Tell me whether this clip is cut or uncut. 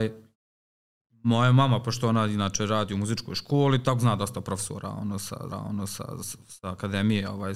cut